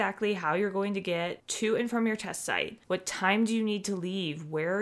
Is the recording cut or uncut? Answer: uncut